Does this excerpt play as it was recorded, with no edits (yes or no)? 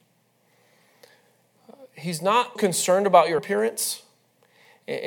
no